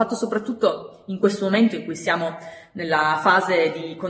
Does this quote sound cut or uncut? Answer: uncut